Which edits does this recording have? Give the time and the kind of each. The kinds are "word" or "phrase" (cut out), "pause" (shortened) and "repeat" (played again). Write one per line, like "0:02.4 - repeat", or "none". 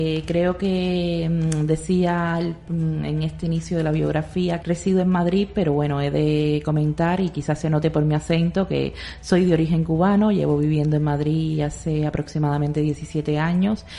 0:04.6 - word

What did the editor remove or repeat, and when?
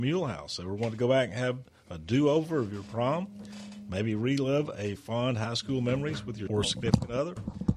0:05.0 - word
0:06.5 - word

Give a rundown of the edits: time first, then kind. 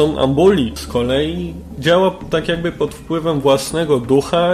none

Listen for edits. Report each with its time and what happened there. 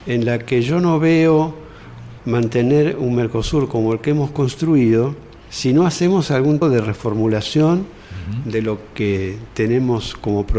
0:02.2 - word
0:06.6 - word

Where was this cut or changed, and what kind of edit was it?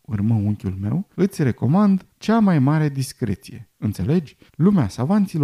0:01.1 - pause
0:02.1 - pause
0:04.5 - pause

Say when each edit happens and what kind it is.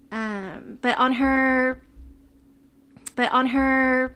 0:03.1 - repeat

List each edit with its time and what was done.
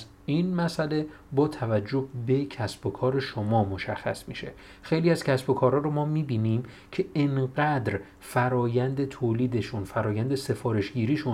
none

